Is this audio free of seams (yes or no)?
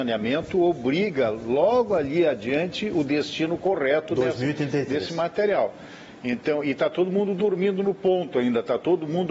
yes